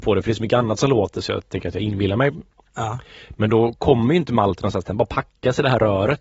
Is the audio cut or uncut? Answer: uncut